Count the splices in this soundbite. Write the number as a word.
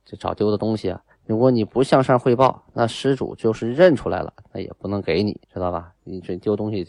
two